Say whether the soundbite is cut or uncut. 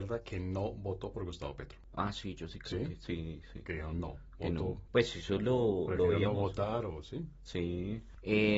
uncut